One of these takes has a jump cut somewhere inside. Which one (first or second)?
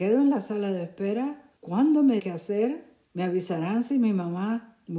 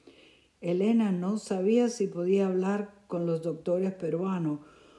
first